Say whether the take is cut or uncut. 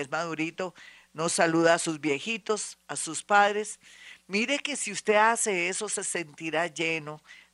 uncut